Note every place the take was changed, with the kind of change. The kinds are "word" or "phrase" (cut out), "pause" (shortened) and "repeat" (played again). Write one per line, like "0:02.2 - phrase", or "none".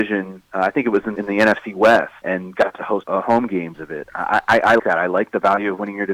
0:01.2 - word
0:02.2 - word
0:03.0 - word
0:03.7 - word
0:04.8 - word